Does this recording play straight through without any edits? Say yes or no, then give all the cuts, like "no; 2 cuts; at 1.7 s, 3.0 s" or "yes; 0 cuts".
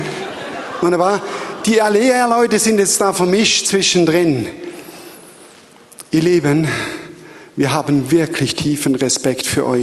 yes; 0 cuts